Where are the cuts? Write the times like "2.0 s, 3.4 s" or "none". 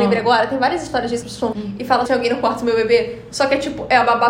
1.2 s, 1.5 s, 2.1 s